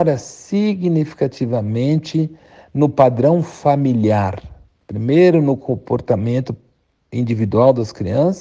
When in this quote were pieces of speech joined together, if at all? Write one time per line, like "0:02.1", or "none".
none

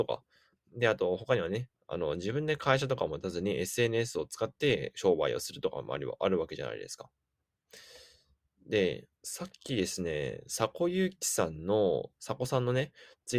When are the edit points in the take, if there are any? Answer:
0:09.1

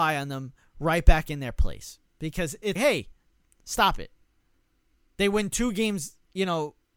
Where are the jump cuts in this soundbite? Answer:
0:02.8

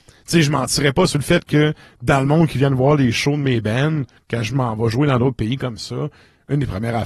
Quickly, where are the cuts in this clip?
none

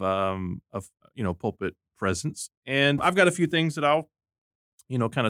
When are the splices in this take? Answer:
0:01.0
0:03.0

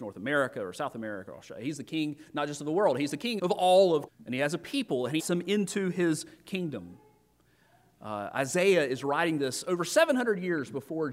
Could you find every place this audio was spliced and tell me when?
0:03.4
0:04.1
0:05.2

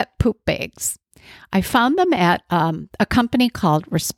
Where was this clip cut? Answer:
none

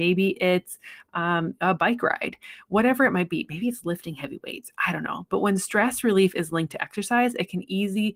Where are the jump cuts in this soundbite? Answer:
none

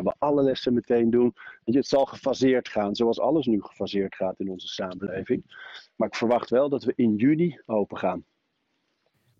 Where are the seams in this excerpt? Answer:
none

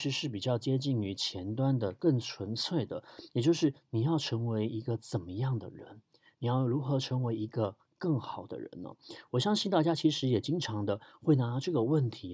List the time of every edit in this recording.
none

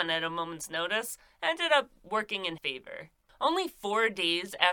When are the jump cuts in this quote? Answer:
0:02.6

